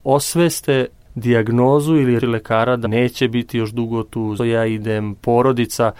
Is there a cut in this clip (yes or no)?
yes